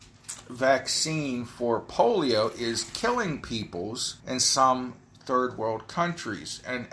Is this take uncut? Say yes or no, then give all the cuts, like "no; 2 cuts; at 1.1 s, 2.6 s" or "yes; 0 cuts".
no; 1 cut; at 4.2 s